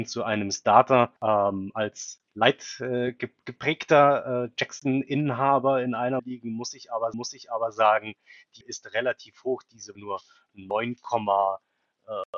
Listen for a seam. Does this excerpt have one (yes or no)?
yes